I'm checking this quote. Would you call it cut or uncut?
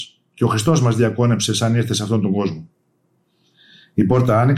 uncut